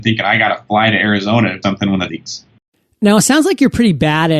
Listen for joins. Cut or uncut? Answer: cut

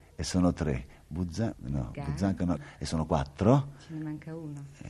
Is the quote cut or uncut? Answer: cut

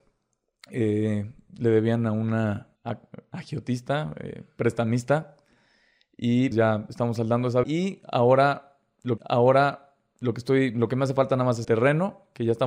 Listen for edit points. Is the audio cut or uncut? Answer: cut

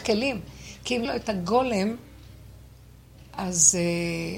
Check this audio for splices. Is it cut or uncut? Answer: cut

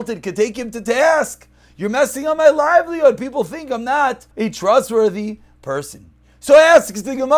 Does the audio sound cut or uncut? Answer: cut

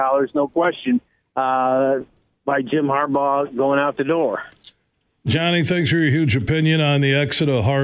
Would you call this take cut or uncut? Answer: uncut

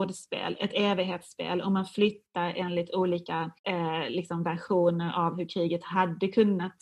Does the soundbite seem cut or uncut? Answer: cut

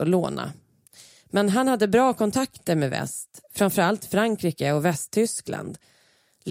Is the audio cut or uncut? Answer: uncut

